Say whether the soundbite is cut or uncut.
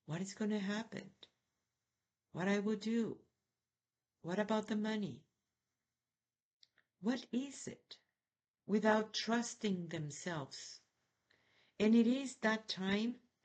uncut